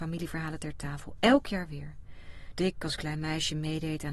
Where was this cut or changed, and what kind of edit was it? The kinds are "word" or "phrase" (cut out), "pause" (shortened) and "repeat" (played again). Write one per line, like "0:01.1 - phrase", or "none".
0:02.6 - word